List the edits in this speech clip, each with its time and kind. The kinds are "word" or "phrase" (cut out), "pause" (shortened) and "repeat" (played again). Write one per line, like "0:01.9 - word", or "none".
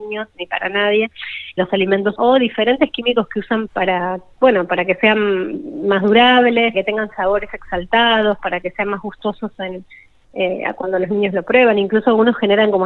0:01.6 - word
0:02.2 - word
0:03.7 - word
0:06.7 - word